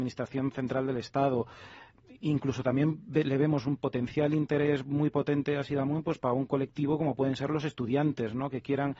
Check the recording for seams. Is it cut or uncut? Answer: uncut